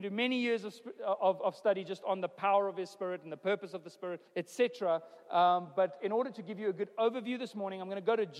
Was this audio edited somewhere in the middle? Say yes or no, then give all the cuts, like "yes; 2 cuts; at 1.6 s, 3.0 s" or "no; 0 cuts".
yes; 1 cut; at 4.3 s